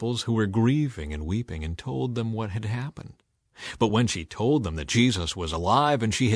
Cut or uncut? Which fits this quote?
uncut